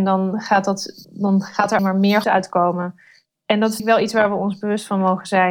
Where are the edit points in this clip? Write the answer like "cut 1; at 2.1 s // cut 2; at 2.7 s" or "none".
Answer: cut 1; at 1.0 s // cut 2; at 1.8 s // cut 3; at 2.2 s // cut 4; at 3.8 s